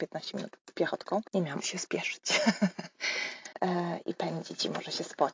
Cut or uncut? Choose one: cut